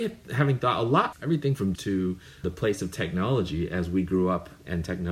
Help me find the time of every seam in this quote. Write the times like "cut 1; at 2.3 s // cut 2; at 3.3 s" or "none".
cut 1; at 1.1 s // cut 2; at 1.7 s // cut 3; at 2.4 s